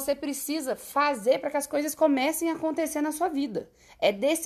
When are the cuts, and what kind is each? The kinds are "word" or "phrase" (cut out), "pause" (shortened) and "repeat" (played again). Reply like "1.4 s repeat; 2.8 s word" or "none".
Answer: none